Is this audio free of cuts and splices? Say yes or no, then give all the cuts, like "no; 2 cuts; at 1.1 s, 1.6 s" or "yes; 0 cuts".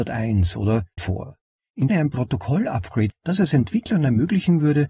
no; 3 cuts; at 1.0 s, 1.9 s, 3.1 s